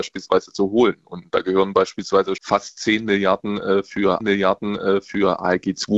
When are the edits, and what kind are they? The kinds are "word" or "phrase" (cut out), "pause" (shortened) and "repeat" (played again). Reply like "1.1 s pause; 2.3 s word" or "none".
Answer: 2.4 s word; 4.2 s repeat